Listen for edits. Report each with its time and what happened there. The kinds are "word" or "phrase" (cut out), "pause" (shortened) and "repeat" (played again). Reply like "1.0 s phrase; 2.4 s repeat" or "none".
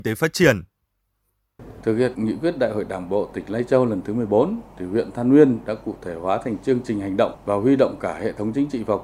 none

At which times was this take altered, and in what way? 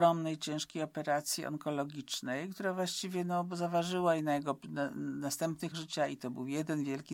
5.7 s word

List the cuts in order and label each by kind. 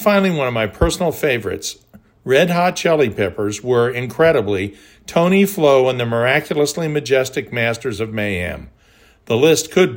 none

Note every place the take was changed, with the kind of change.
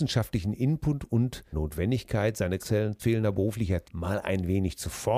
1.5 s word; 2.6 s word; 3.0 s word; 3.8 s word

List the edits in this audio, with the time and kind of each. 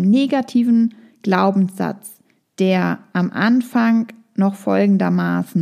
none

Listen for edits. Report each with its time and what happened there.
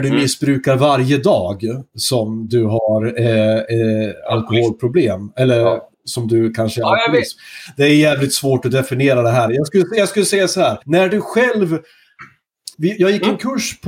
5.9 s pause; 10.8 s pause; 12.7 s pause

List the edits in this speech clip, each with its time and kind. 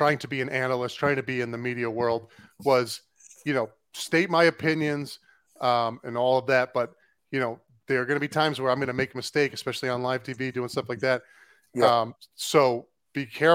none

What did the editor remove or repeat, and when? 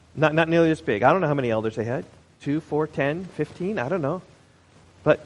none

